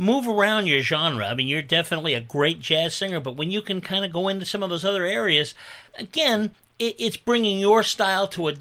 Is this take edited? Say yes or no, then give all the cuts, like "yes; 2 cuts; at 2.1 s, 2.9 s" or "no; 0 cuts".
yes; 1 cut; at 5.9 s